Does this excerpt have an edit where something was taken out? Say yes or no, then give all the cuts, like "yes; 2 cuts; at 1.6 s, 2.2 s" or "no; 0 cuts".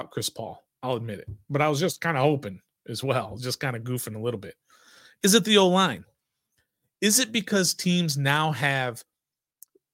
no; 0 cuts